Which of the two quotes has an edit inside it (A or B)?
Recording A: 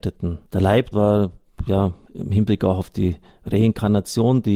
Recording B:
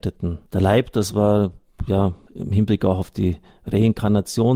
A